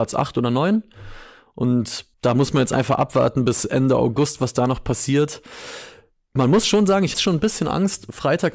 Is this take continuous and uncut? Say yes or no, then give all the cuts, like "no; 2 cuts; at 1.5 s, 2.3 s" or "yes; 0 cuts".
no; 2 cuts; at 2.1 s, 7.1 s